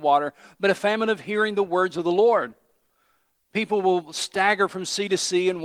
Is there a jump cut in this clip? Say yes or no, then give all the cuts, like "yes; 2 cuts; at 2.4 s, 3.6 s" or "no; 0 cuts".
no; 0 cuts